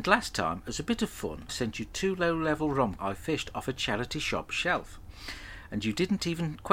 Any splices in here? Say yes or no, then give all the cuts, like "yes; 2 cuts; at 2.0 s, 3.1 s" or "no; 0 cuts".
yes; 2 cuts; at 1.5 s, 3.0 s